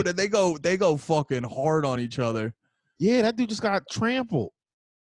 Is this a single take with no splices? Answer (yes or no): yes